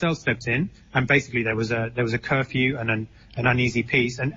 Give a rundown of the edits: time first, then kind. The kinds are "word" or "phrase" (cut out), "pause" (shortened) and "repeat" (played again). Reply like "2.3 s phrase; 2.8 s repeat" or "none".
none